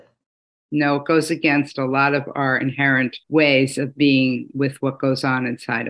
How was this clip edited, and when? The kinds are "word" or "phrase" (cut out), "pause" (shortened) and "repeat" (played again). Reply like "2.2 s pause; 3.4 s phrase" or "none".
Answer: 3.2 s pause

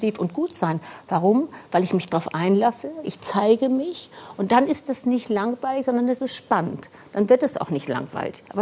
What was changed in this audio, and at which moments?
none

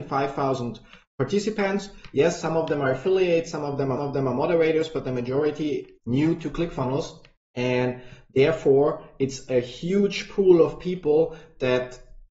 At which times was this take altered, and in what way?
4.0 s repeat; 6.0 s word; 7.4 s pause

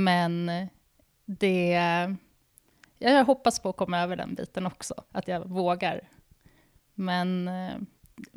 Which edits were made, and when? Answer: none

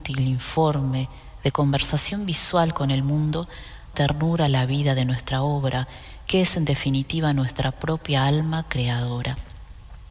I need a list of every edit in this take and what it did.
3.9 s phrase

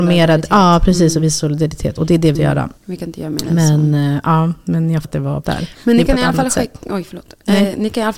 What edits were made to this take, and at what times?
2.3 s word; 2.8 s pause; 5.0 s word; 5.4 s word

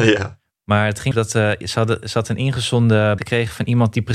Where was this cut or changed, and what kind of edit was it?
1.1 s word; 3.2 s word

